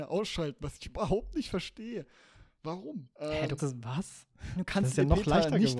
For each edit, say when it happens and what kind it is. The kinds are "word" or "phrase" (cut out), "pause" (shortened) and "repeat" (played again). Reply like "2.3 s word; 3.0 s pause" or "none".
3.1 s pause; 3.6 s word